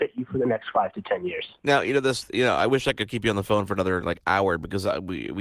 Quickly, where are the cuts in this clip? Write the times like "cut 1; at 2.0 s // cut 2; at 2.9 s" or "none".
none